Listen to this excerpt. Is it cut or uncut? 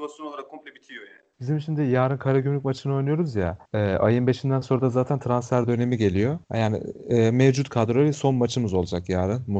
cut